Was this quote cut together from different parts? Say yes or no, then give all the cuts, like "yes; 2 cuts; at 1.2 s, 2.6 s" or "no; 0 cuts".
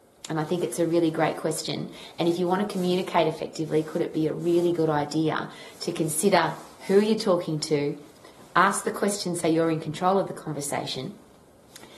no; 0 cuts